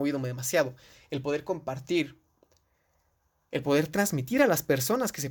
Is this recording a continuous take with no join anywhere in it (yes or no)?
yes